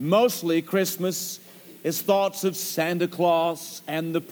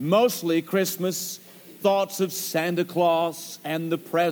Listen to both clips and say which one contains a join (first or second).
second